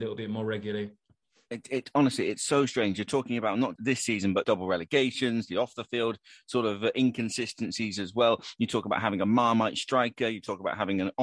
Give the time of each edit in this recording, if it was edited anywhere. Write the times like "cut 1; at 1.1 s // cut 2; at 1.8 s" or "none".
cut 1; at 3.8 s // cut 2; at 4.4 s

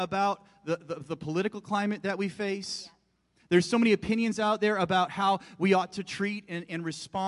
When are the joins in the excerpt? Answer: none

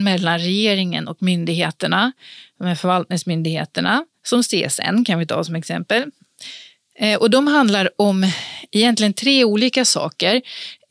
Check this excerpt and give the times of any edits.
none

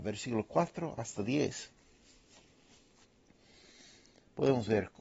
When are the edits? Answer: none

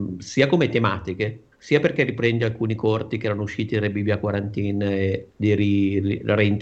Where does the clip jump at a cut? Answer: cut 1; at 1.5 s

